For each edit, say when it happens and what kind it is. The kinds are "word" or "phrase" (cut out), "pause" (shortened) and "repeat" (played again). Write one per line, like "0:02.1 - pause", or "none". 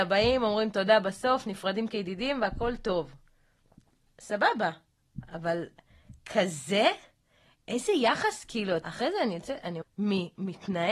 0:08.8 - word
0:09.8 - word